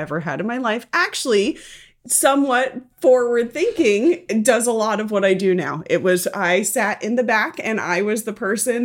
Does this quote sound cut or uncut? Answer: uncut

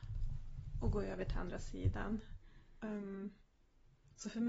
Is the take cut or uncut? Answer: uncut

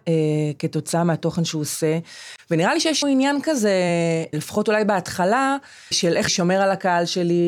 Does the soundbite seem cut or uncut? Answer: cut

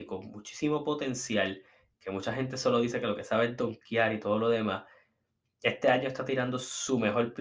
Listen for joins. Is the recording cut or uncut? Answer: uncut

